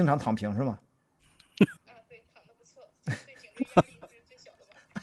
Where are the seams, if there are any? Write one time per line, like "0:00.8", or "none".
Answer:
0:01.8